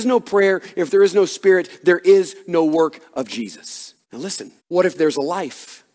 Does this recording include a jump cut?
yes; 2 cuts; at 4.0 s, 4.6 s

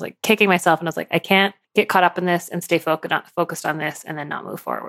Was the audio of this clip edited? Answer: yes; 1 cut; at 1.6 s

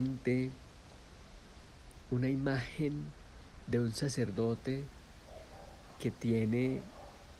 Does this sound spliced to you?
no; 0 cuts

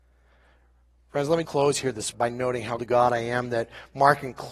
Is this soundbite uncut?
no; 3 cuts; at 1.4 s, 2.1 s, 2.8 s

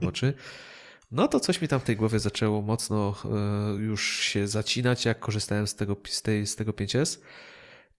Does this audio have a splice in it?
no; 0 cuts

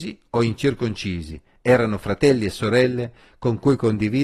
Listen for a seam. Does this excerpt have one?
no; 0 cuts

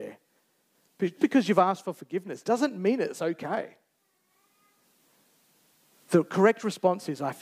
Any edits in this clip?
yes; 1 cut; at 1.2 s

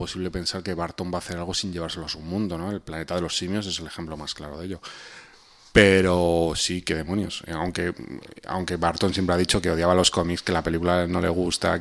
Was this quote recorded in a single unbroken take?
yes; 0 cuts

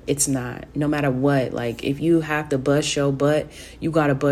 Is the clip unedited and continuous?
yes; 0 cuts

